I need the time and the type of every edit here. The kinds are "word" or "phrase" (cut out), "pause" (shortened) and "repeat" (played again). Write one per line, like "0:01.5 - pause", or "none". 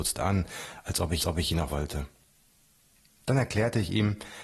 0:01.2 - repeat
0:01.7 - phrase